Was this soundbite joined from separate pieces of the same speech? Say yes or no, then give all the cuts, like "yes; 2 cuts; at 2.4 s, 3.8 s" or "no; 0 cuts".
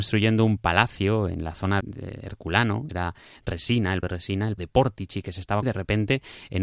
yes; 5 cuts; at 1.8 s, 2.9 s, 4.0 s, 4.6 s, 5.6 s